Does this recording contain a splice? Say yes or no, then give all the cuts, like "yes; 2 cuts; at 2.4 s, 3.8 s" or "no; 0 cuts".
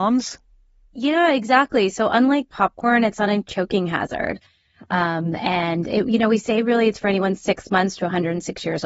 no; 0 cuts